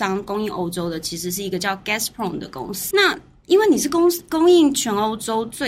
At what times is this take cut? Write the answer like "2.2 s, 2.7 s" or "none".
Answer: 2.9 s